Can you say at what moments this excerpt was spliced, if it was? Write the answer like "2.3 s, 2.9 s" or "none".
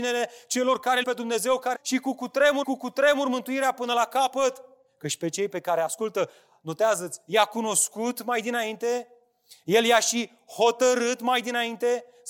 1.0 s, 1.7 s, 2.6 s